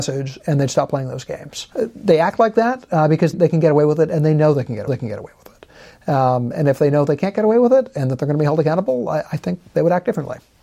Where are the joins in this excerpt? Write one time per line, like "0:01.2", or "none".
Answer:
0:01.7
0:03.3
0:04.9